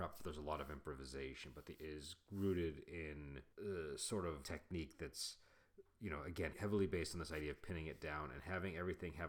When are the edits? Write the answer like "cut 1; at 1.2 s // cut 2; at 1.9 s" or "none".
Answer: cut 1; at 1.8 s // cut 2; at 3.5 s // cut 3; at 4.4 s // cut 4; at 6.5 s